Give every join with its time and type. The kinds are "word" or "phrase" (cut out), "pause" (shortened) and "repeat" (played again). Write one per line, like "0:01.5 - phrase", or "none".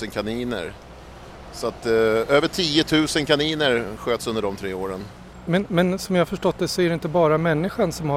none